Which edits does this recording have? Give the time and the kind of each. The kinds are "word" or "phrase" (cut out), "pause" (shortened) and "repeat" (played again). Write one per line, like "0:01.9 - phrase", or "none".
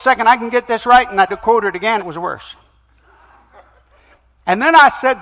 0:01.3 - word
0:02.0 - word

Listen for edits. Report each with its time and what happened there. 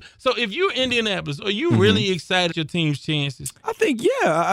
0:02.5 - word

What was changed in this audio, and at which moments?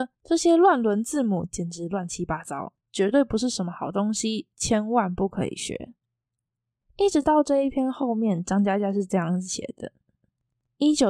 none

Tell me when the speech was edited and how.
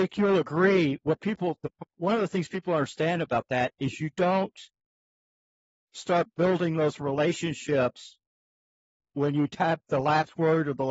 none

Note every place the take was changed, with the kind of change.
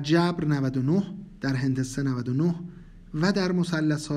none

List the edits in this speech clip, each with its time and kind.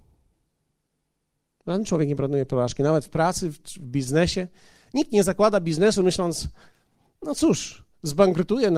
none

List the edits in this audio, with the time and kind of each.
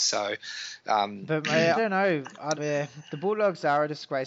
0:01.7 - word
0:02.5 - word

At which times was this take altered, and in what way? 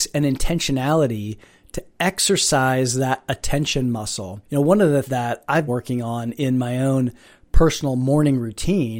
0:04.4 - pause
0:05.0 - word
0:05.7 - word

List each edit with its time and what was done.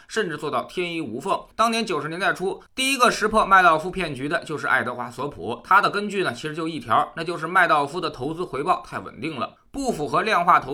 0:01.5 - pause

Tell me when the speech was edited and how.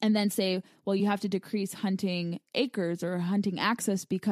none

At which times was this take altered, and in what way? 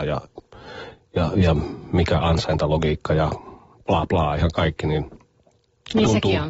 0:04.1 - word

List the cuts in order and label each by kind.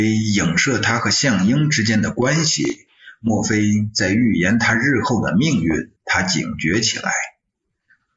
0:06.0 - pause

